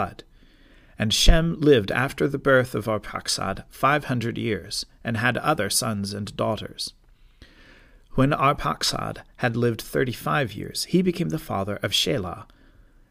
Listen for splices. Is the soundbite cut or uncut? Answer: uncut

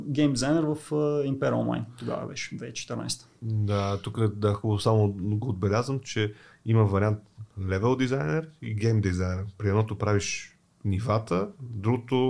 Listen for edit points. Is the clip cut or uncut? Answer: uncut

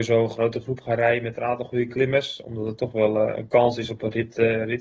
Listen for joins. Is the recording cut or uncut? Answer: uncut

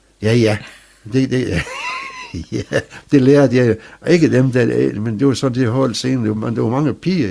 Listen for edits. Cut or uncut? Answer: uncut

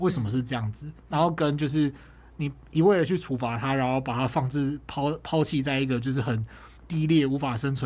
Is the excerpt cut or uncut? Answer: cut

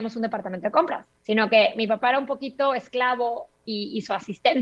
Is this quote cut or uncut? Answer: cut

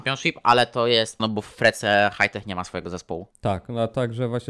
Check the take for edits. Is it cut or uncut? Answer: cut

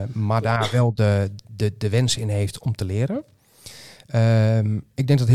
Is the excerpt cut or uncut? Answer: uncut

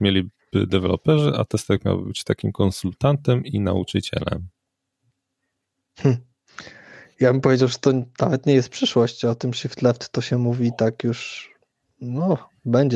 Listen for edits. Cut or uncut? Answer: uncut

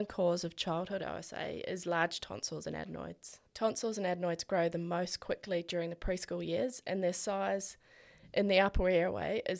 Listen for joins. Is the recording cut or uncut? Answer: cut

